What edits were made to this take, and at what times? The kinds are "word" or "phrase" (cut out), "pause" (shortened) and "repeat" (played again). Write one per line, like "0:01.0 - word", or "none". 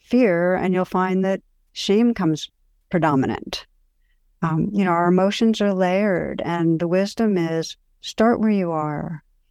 none